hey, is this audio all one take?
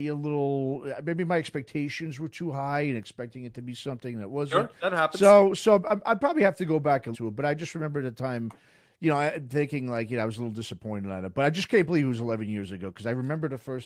no; 1 cut; at 7.1 s

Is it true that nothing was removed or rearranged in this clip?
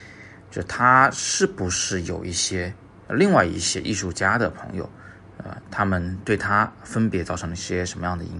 yes; 0 cuts

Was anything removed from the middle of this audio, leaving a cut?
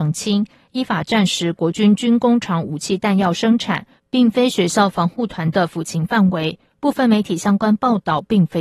no; 0 cuts

